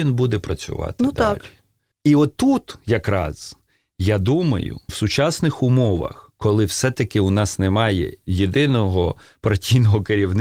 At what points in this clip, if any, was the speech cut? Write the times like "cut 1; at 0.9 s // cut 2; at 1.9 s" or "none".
cut 1; at 4.9 s